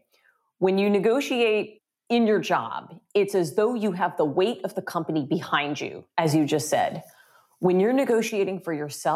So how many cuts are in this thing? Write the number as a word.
zero